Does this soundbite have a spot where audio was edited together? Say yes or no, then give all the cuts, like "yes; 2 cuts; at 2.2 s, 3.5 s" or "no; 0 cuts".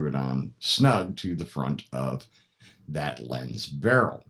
no; 0 cuts